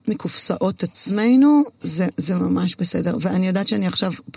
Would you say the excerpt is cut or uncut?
uncut